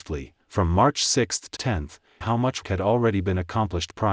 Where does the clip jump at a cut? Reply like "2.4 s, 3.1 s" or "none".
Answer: 1.6 s, 2.2 s, 2.6 s